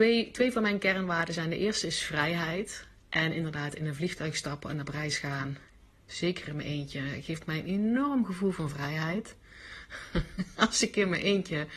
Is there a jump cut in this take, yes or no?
no